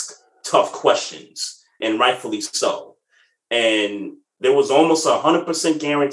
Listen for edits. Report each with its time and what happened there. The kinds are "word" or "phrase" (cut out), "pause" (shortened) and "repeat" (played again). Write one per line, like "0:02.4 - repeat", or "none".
0:01.8 - word